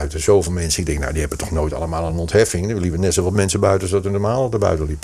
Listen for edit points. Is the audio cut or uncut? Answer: uncut